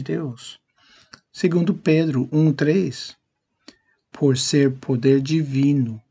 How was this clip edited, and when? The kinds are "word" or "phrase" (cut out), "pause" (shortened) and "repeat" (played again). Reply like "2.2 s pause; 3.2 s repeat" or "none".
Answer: none